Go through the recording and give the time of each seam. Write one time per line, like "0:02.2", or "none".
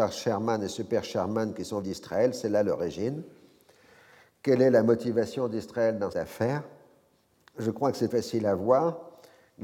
0:01.8
0:06.1
0:08.1